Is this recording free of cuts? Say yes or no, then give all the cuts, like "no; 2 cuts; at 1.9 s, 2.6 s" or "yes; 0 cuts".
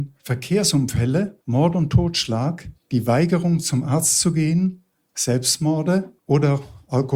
no; 3 cuts; at 1.4 s, 2.8 s, 6.2 s